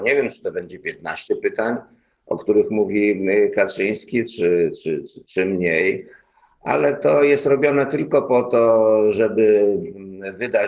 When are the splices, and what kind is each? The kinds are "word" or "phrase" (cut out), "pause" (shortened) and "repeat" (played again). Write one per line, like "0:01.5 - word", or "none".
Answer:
none